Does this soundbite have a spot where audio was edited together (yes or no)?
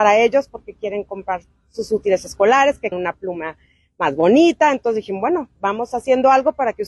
yes